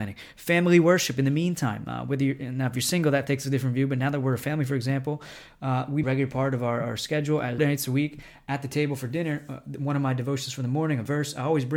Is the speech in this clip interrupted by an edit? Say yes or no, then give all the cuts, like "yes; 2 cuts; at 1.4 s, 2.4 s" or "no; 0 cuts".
yes; 2 cuts; at 6.0 s, 7.6 s